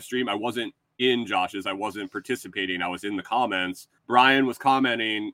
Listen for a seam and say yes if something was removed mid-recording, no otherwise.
yes